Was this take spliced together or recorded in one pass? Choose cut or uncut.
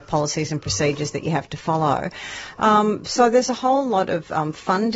uncut